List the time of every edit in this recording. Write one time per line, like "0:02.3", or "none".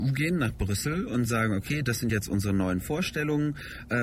none